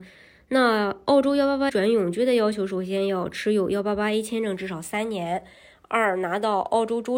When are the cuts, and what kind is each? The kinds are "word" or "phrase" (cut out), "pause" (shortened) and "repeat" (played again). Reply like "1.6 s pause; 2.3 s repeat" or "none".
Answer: 1.7 s word